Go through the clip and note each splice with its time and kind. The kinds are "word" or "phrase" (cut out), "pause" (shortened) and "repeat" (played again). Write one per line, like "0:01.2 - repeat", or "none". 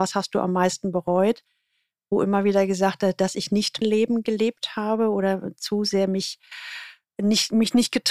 0:03.8 - word